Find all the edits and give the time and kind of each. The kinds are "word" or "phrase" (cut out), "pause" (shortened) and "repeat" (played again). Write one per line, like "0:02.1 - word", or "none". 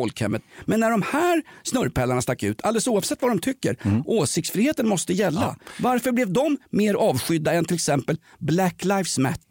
none

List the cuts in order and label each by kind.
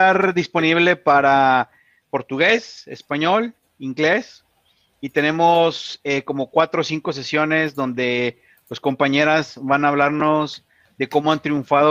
none

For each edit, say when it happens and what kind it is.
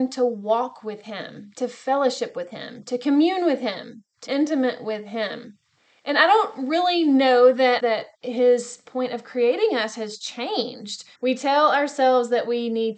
0:04.3 - word
0:05.8 - pause
0:07.8 - phrase
0:08.1 - pause
0:11.1 - pause

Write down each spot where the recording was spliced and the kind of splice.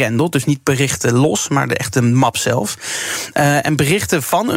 none

